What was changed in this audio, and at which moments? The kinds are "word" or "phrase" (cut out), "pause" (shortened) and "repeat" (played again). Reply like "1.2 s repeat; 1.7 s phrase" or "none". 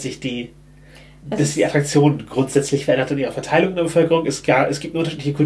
none